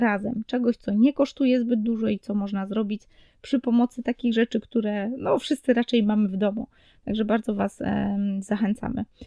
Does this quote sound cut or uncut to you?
uncut